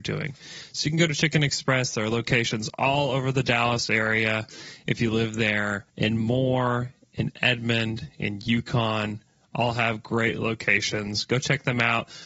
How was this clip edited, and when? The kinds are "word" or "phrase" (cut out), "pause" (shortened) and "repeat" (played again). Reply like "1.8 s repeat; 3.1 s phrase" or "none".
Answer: 5.9 s pause